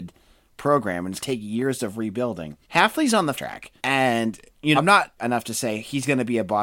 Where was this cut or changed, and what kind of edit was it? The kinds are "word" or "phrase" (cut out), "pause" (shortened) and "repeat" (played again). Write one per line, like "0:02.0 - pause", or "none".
0:01.2 - word
0:02.6 - pause
0:03.4 - word
0:03.8 - pause
0:04.7 - word
0:05.2 - word